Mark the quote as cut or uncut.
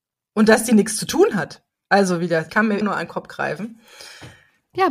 cut